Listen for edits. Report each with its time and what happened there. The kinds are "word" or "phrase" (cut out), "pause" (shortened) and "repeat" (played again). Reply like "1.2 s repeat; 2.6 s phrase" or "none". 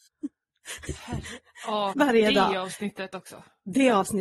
1.9 s word